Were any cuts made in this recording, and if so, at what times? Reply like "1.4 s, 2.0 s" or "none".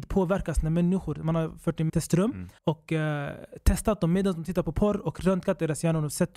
1.9 s, 2.6 s